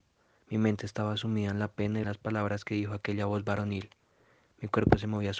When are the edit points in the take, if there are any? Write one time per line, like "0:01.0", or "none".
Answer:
0:02.0

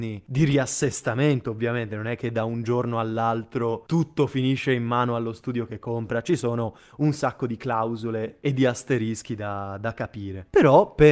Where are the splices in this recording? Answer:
none

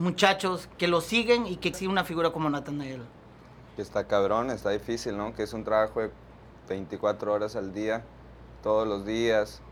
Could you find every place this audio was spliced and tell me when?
0:01.7

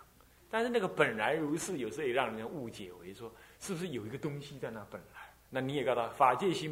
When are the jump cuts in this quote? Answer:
0:05.4

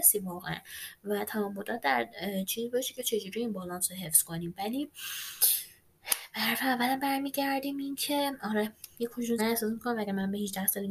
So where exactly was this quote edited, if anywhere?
0:09.4

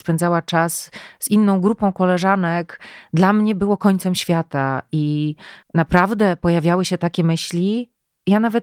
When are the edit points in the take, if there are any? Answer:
0:05.6

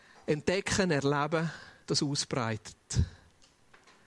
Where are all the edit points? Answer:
0:01.8

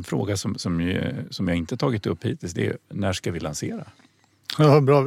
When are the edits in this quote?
none

